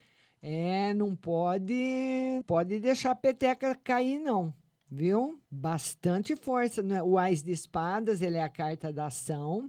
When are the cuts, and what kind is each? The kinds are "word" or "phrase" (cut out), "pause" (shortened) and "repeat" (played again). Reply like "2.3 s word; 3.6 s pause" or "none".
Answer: 2.4 s word; 5.5 s pause